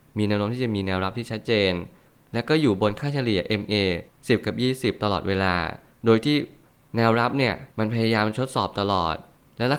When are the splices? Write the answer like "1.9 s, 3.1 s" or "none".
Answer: 7.7 s